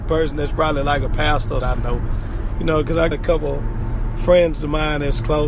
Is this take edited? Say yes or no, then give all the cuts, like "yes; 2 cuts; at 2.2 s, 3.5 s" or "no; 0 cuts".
yes; 2 cuts; at 1.6 s, 3.1 s